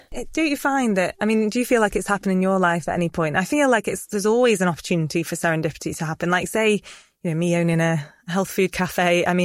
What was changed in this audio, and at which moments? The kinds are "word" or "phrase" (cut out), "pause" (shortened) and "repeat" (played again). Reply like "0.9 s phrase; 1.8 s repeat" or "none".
none